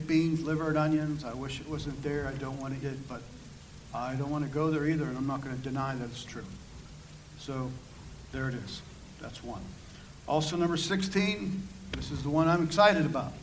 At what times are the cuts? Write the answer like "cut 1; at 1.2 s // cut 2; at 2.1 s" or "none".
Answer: cut 1; at 2.8 s // cut 2; at 6.3 s